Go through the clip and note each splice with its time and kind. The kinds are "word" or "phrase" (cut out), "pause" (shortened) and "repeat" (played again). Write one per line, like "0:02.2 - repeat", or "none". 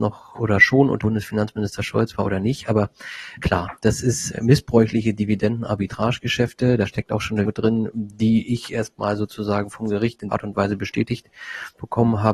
0:01.0 - word
0:03.4 - word
0:04.3 - word
0:07.4 - word
0:10.3 - word